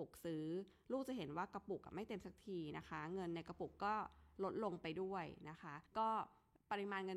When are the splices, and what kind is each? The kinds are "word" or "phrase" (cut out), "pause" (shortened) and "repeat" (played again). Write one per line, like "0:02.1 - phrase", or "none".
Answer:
0:05.9 - pause